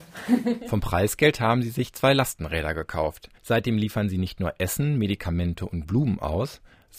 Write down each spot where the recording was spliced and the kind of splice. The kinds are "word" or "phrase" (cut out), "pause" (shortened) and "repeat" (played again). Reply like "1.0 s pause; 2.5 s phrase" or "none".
3.4 s pause